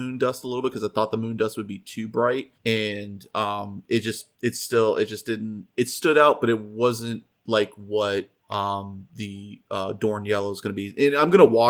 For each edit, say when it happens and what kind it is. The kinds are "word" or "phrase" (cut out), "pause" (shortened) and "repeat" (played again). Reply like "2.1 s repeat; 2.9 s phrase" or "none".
2.5 s pause; 4.3 s pause; 8.4 s pause